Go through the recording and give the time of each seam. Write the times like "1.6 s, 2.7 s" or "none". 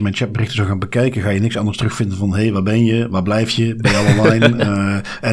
none